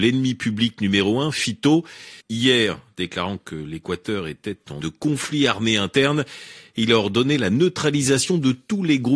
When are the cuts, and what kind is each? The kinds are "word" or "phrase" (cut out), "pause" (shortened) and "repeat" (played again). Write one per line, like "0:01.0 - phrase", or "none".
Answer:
0:02.2 - pause
0:04.8 - phrase